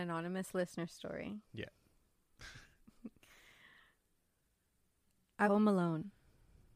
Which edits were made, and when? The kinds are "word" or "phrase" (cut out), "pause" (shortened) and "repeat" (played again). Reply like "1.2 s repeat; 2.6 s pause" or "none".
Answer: 1.4 s pause; 5.4 s word

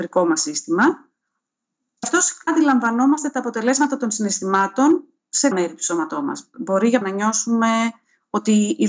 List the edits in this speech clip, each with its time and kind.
2.0 s word; 2.5 s word; 5.5 s word; 7.0 s word

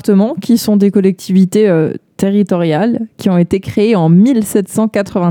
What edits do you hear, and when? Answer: none

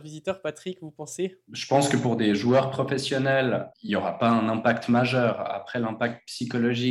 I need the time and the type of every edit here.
none

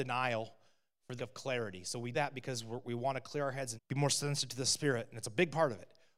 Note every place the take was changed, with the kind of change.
1.2 s word; 2.1 s word; 3.8 s word

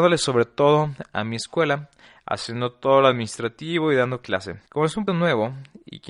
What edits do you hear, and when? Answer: 4.7 s pause; 5.1 s word

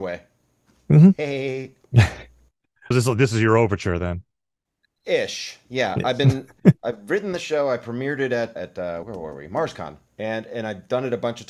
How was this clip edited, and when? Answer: 2.9 s word; 4.7 s pause; 8.6 s word; 9.0 s word; 10.1 s pause

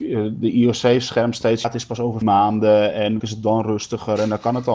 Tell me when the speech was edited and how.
1.6 s word; 2.2 s word; 3.2 s word

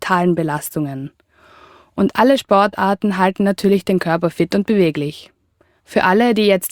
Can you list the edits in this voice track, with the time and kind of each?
none

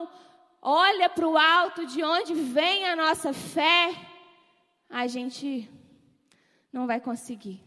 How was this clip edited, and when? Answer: none

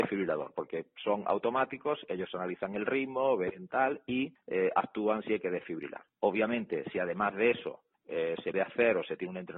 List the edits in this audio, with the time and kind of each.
8.5 s word

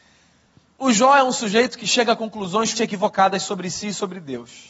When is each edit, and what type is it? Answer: 2.7 s word

